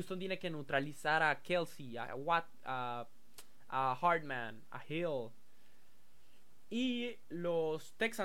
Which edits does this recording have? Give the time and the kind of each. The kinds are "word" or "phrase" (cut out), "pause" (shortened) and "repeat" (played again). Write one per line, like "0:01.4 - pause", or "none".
none

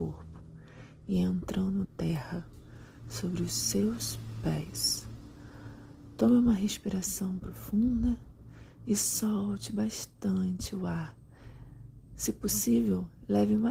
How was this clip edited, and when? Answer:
0:01.8 - word

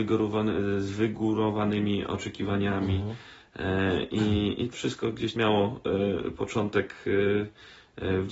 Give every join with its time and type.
0:04.7 - word
0:05.4 - word

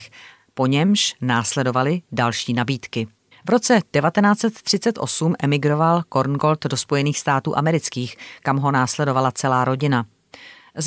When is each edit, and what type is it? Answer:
0:03.3 - pause

